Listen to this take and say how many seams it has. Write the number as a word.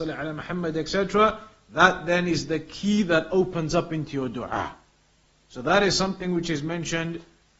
zero